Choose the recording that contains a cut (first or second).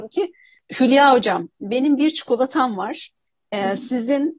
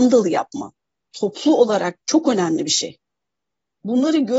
second